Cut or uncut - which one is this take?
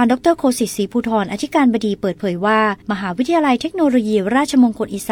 cut